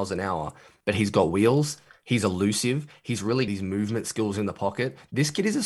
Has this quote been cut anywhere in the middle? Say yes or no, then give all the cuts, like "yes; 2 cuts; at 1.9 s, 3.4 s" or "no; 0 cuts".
yes; 1 cut; at 3.5 s